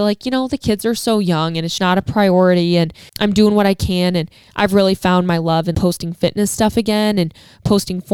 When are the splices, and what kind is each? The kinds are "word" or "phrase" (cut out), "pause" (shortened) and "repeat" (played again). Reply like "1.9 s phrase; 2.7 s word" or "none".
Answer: 1.8 s word; 3.1 s word; 5.7 s word